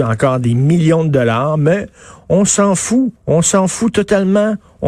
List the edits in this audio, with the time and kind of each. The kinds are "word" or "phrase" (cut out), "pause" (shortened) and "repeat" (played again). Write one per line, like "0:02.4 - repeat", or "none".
0:03.2 - pause